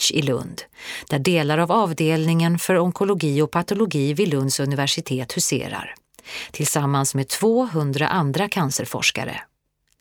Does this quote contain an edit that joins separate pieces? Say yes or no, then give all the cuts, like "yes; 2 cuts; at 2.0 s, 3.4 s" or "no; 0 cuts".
no; 0 cuts